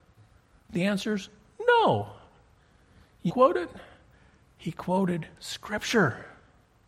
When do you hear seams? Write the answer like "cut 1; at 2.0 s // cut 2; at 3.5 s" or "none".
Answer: cut 1; at 3.3 s